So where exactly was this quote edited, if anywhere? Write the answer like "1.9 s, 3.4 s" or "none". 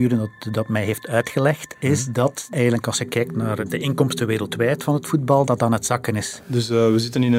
5.5 s